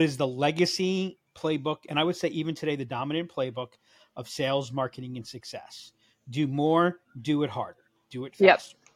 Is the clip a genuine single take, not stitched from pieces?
yes; 0 cuts

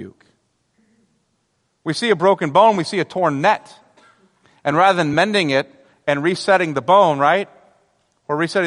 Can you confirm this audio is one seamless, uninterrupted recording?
yes; 0 cuts

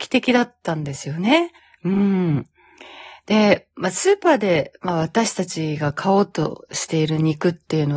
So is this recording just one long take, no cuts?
no; 1 cut; at 1.6 s

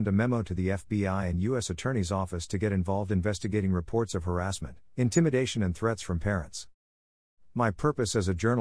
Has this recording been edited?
no; 0 cuts

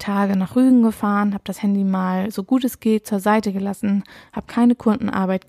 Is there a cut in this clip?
no; 0 cuts

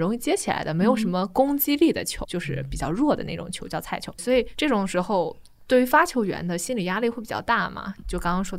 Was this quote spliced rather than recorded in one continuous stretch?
yes; 2 cuts; at 2.2 s, 4.2 s

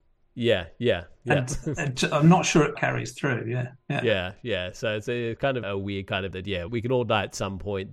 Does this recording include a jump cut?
yes; 4 cuts; at 2.7 s, 5.6 s, 6.3 s, 6.7 s

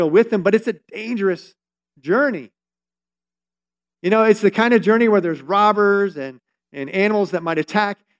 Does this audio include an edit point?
no; 0 cuts

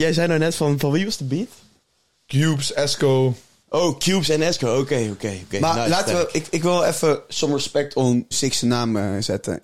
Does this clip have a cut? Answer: yes; 1 cut; at 8.3 s

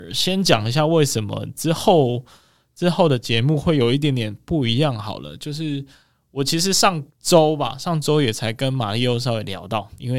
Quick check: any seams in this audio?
yes; 1 cut; at 7.1 s

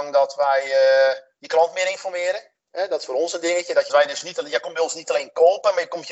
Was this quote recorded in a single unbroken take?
no; 2 cuts; at 2.6 s, 3.9 s

